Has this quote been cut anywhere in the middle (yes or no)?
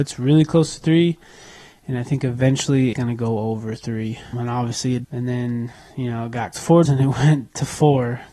yes